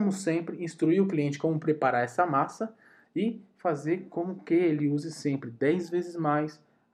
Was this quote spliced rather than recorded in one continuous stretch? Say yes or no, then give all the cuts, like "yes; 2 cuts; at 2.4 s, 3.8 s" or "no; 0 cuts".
no; 0 cuts